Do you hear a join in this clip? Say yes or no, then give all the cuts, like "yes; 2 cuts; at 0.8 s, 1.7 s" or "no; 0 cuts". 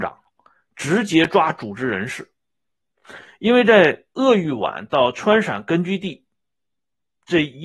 no; 0 cuts